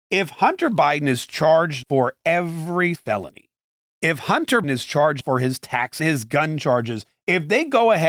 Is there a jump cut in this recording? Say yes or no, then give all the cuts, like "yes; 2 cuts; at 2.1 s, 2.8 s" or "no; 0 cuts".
yes; 5 cuts; at 1.8 s, 2.9 s, 4.6 s, 5.2 s, 6.0 s